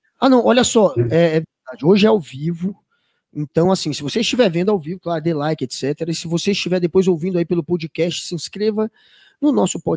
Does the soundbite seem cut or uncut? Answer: uncut